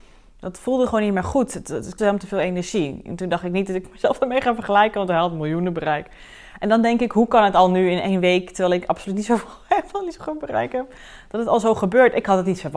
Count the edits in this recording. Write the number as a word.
one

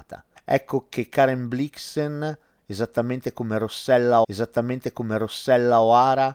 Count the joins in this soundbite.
one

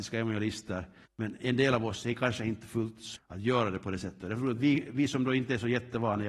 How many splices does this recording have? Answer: two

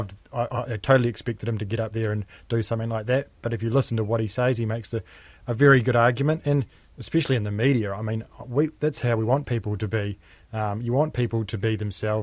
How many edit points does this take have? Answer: zero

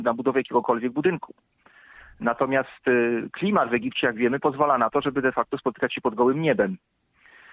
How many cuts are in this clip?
zero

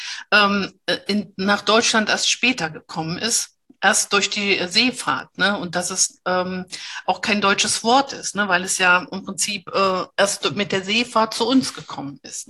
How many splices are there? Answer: one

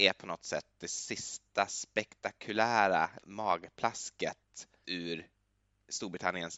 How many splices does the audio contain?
two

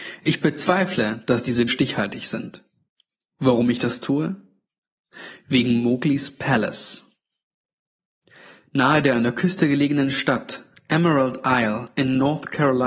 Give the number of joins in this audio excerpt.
one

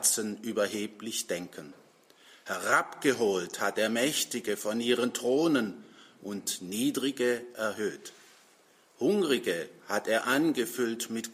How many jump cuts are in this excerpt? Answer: zero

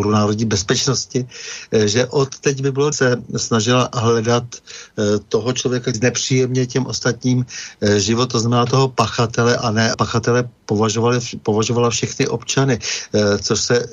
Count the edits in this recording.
three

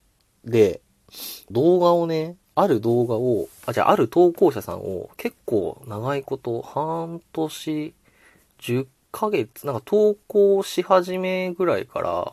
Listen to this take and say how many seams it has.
two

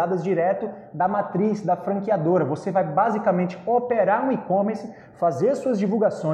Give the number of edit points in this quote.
zero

